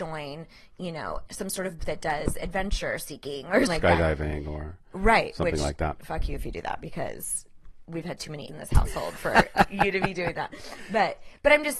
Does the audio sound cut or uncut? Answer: cut